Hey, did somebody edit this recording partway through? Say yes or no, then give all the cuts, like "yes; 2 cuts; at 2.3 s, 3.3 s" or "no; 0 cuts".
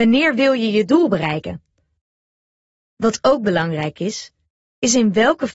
no; 0 cuts